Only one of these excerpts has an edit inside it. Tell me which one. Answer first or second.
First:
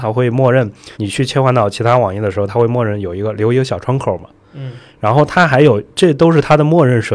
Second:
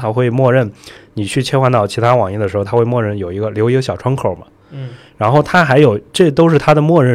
first